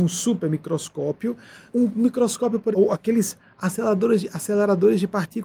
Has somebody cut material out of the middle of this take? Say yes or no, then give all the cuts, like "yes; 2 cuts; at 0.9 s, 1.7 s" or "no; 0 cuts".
yes; 2 cuts; at 1.7 s, 2.7 s